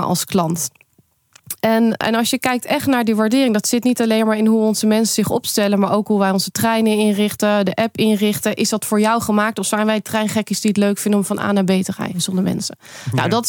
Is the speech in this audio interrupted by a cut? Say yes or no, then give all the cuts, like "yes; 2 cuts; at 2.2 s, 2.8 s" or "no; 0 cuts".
yes; 1 cut; at 2.0 s